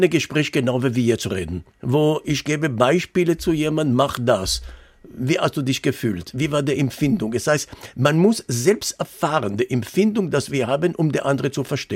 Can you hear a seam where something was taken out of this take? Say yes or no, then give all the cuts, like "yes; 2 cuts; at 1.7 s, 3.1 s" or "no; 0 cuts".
yes; 1 cut; at 1.7 s